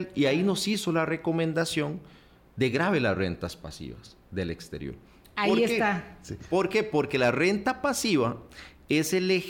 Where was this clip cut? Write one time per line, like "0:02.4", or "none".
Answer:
none